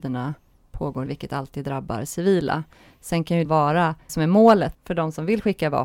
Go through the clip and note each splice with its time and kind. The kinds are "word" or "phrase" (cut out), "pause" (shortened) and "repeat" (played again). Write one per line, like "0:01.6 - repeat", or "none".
0:01.1 - word
0:03.4 - word
0:04.1 - word
0:04.7 - word